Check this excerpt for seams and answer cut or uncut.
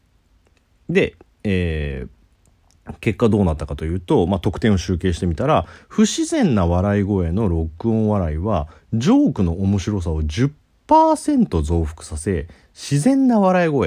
uncut